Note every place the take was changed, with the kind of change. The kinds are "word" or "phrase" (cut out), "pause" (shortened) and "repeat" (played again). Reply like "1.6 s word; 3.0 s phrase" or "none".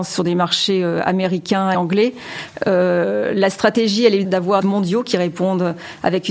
1.7 s word; 4.2 s word; 4.6 s phrase